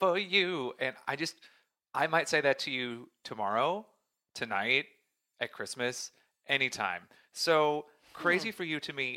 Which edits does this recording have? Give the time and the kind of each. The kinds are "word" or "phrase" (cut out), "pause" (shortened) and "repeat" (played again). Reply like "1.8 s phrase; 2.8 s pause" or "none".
none